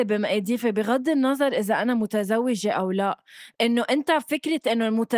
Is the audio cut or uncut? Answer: cut